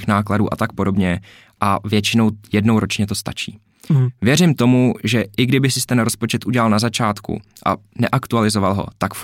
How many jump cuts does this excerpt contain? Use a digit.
0